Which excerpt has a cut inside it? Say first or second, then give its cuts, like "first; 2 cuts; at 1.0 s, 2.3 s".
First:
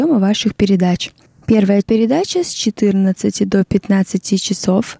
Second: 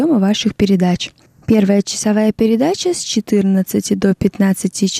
first; 1 cut; at 1.8 s